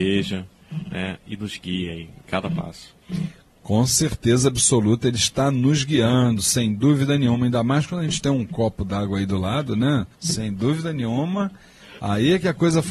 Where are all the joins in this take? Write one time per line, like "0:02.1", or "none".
0:10.1